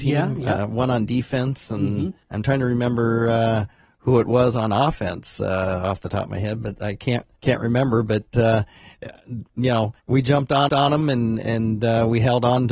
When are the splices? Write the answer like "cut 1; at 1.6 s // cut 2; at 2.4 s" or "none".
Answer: cut 1; at 2.2 s // cut 2; at 7.4 s // cut 3; at 10.0 s // cut 4; at 10.7 s